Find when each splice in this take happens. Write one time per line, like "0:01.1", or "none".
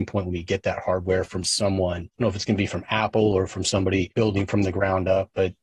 none